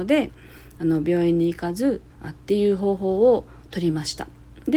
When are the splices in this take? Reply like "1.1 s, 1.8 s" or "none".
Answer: 2.1 s